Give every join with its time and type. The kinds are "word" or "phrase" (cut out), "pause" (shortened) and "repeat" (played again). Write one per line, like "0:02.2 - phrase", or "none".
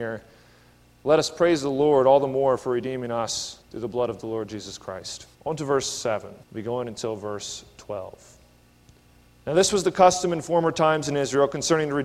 0:03.6 - pause
0:05.3 - pause
0:06.4 - pause